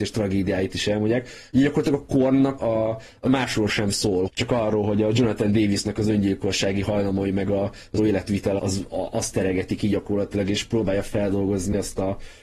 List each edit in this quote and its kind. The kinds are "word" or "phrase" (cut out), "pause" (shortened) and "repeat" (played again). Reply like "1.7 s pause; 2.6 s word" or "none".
2.6 s word; 3.3 s word; 4.3 s word; 8.0 s word; 8.6 s word; 8.9 s word